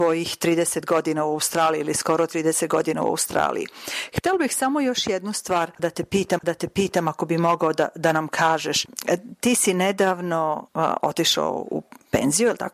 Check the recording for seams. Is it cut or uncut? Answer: cut